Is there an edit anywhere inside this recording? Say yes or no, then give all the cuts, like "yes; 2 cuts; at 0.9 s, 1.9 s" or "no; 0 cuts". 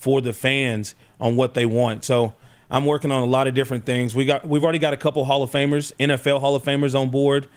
no; 0 cuts